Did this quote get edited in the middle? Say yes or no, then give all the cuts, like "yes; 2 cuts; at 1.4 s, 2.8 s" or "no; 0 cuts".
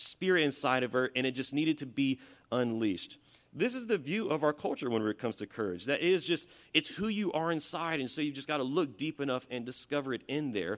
no; 0 cuts